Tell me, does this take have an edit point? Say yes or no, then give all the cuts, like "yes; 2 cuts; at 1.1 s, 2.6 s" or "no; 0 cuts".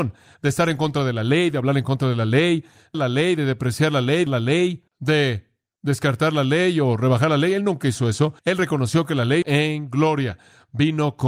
yes; 5 cuts; at 2.9 s, 4.3 s, 4.9 s, 8.4 s, 9.4 s